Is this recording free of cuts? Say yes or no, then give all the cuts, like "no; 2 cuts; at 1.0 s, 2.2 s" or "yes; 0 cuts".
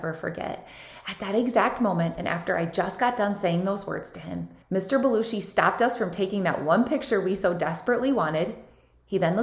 no; 1 cut; at 4.6 s